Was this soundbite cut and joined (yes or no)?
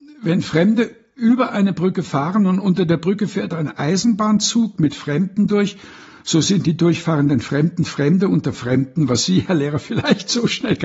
no